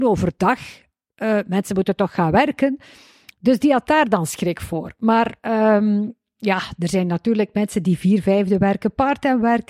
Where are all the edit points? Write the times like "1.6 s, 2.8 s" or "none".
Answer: none